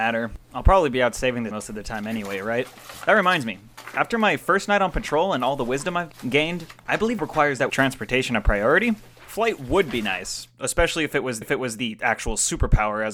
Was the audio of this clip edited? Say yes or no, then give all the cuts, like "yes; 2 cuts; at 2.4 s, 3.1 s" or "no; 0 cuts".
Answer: yes; 4 cuts; at 1.5 s, 7.2 s, 7.7 s, 11.4 s